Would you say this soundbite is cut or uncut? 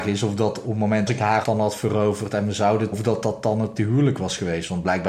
cut